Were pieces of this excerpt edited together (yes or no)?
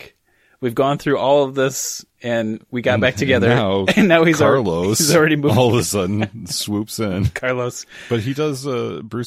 yes